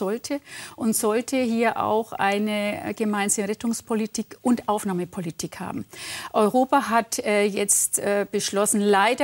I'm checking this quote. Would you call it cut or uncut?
uncut